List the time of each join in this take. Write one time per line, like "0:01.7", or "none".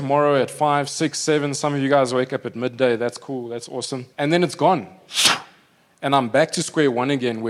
0:04.1